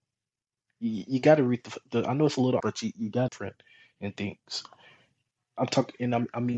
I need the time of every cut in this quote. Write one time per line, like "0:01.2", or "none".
0:02.6
0:03.3